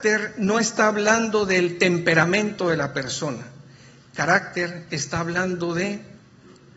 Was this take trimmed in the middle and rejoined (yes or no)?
no